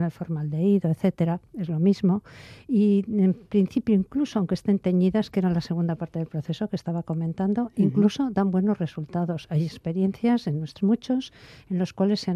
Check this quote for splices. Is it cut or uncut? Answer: cut